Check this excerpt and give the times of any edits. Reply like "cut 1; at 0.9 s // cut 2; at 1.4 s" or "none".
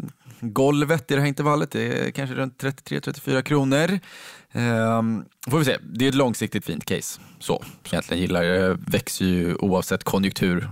cut 1; at 6.6 s // cut 2; at 7.9 s